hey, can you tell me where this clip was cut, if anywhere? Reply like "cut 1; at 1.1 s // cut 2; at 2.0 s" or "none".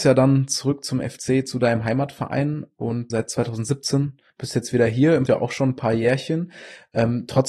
cut 1; at 3.1 s // cut 2; at 4.3 s // cut 3; at 5.3 s